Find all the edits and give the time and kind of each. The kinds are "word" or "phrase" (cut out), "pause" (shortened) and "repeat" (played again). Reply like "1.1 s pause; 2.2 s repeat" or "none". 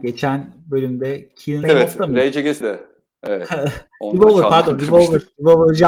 1.6 s word; 2.6 s word